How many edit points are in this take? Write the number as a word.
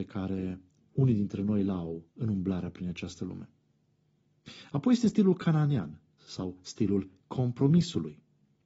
one